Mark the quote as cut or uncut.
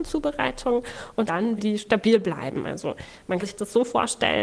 cut